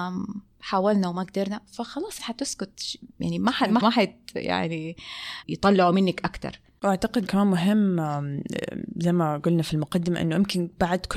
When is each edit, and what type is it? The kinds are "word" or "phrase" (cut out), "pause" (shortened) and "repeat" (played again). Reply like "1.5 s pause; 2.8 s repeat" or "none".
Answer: 2.2 s word; 3.8 s word; 5.4 s phrase; 7.3 s word